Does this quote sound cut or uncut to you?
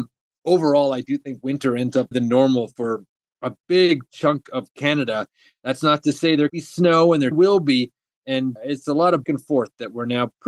cut